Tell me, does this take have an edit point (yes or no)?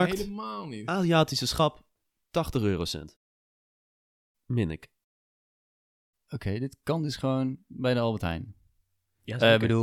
no